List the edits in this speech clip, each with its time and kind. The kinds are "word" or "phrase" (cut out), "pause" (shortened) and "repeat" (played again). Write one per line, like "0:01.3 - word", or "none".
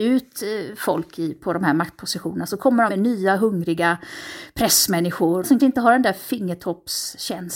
0:02.9 - word
0:05.6 - word